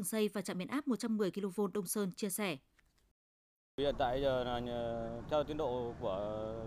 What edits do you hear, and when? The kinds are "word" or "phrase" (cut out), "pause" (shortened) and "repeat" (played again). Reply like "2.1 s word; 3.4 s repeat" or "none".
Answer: none